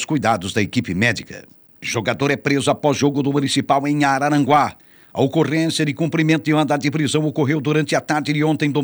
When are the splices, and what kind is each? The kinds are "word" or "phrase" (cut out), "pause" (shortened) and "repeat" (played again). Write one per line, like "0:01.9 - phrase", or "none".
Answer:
none